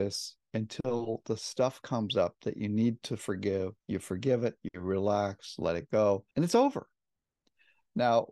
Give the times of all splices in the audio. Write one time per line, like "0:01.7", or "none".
0:03.8
0:06.3

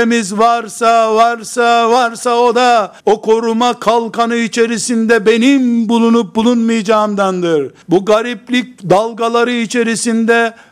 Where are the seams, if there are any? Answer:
0:03.0
0:07.8
0:08.8

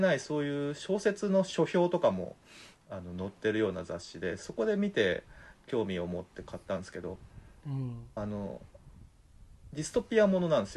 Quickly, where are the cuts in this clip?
none

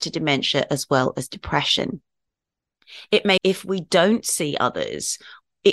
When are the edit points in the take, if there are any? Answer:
0:03.4

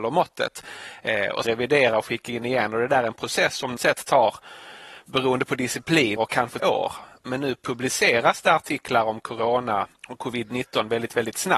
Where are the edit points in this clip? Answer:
0:01.5
0:03.8
0:06.2
0:06.6
0:10.0

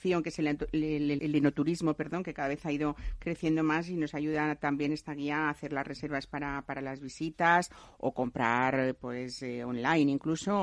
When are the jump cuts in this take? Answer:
0:01.2

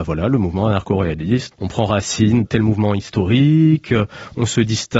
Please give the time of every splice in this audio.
0:01.5
0:02.4

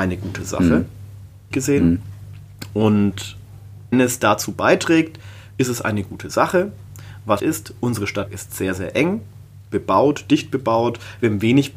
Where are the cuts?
0:01.5
0:03.9
0:07.4
0:08.3

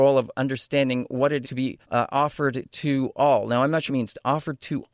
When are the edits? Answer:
0:01.4
0:01.8
0:03.9

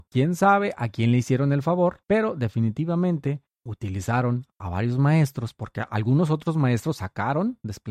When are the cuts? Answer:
none

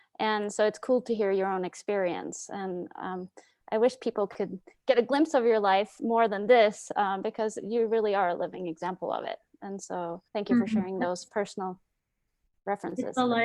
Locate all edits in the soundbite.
0:10.3

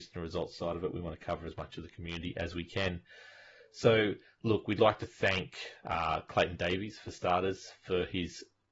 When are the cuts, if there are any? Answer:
none

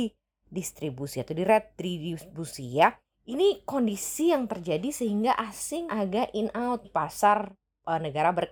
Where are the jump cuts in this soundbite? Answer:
0:03.0
0:05.9
0:06.8

